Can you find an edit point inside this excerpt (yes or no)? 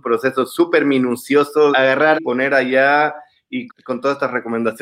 yes